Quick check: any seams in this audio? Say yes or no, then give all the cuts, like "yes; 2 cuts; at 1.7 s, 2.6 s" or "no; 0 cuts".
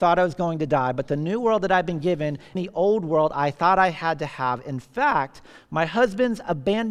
yes; 1 cut; at 2.5 s